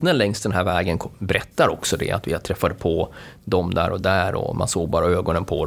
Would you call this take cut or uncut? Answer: uncut